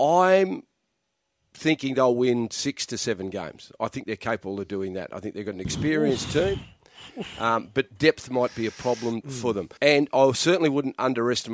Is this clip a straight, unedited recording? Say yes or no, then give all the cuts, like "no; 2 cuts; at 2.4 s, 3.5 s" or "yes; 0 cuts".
no; 1 cut; at 9.8 s